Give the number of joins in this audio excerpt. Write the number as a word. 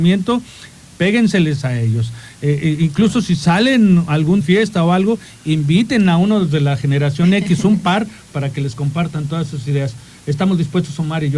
one